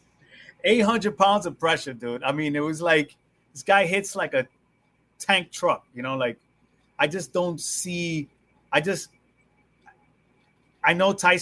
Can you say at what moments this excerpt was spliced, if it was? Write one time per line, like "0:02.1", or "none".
none